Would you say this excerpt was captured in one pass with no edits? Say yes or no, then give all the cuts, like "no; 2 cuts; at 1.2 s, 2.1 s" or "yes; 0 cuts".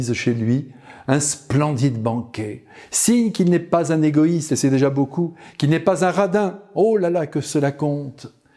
yes; 0 cuts